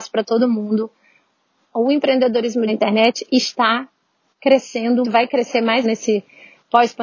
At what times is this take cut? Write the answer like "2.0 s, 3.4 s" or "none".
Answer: 2.7 s, 5.0 s, 5.8 s